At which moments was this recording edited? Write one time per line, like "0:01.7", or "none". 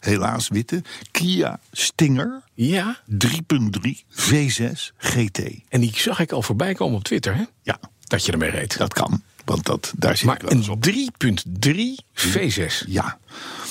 0:02.5
0:04.0
0:07.5
0:12.1